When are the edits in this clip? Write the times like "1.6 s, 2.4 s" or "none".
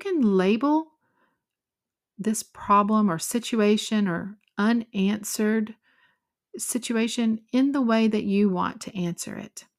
none